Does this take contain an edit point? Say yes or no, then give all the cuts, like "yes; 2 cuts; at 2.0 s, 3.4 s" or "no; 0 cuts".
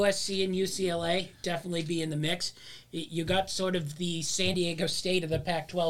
no; 0 cuts